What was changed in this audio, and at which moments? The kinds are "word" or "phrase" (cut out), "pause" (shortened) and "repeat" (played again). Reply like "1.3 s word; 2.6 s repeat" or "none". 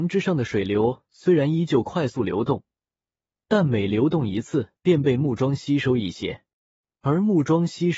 4.8 s pause